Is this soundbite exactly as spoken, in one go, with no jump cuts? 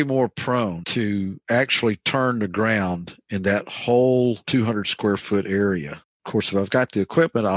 yes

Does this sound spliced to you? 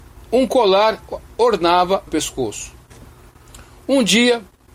yes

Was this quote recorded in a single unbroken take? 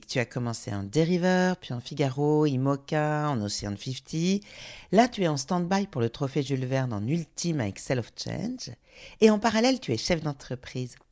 yes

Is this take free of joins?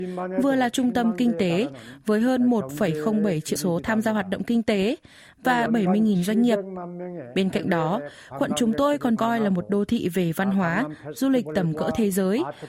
no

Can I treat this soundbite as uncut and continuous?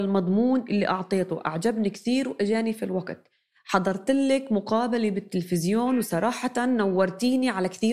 yes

